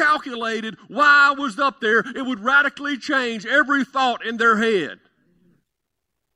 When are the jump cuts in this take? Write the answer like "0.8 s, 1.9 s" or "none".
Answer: none

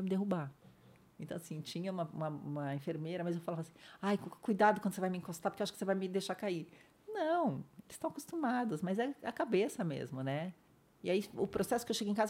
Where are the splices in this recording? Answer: 10.7 s

